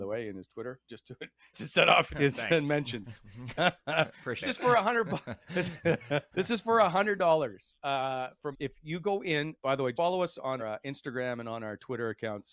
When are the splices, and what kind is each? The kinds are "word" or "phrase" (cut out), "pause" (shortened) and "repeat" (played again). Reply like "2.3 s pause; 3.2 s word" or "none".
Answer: 1.5 s word; 2.1 s word; 3.6 s word; 4.4 s word; 6.3 s word; 8.5 s word; 9.6 s word; 9.9 s word; 10.6 s word